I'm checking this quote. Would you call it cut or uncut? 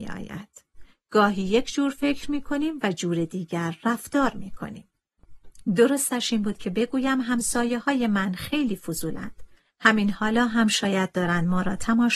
uncut